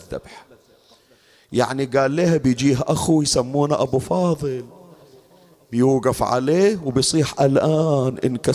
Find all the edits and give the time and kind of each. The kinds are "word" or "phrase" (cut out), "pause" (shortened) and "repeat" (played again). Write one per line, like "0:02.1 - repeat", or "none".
none